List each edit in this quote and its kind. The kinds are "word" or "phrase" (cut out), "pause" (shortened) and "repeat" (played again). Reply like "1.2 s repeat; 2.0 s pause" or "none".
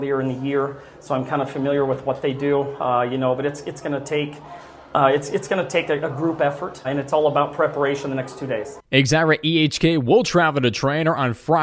6.8 s word